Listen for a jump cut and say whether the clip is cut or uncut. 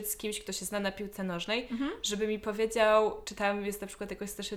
uncut